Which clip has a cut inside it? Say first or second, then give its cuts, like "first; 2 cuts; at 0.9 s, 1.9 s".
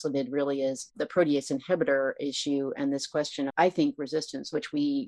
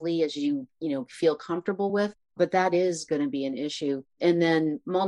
first; 1 cut; at 3.5 s